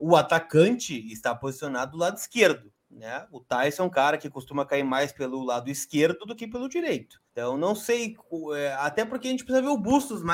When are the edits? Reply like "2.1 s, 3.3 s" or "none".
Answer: 2.8 s, 7.3 s